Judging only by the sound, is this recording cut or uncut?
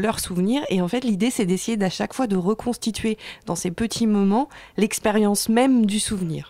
uncut